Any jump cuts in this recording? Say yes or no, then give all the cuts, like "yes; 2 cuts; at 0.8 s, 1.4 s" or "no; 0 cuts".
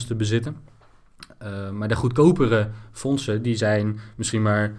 no; 0 cuts